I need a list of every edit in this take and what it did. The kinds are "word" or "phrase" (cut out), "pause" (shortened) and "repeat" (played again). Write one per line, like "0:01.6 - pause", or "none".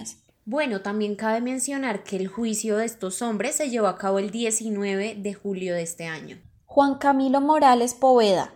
none